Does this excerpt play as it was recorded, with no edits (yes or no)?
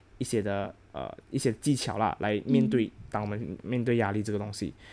no